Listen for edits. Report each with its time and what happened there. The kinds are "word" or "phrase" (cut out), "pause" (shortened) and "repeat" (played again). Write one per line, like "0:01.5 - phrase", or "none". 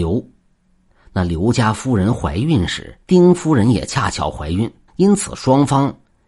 0:03.0 - pause
0:04.9 - pause